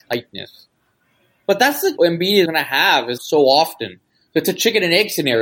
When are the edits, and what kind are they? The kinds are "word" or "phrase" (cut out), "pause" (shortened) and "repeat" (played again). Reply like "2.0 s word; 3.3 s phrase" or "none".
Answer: 2.0 s phrase; 2.5 s word; 3.2 s phrase